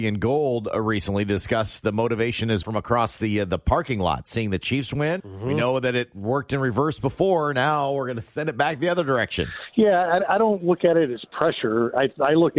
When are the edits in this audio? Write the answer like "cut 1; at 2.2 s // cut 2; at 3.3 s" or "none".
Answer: cut 1; at 2.6 s // cut 2; at 5.2 s